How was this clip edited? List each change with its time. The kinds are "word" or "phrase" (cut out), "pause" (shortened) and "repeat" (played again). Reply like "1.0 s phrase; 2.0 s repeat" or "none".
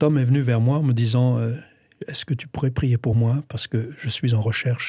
none